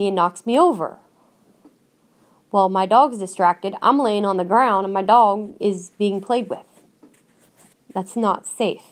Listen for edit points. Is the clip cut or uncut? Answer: uncut